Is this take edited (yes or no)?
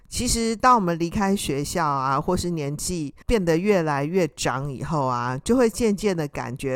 yes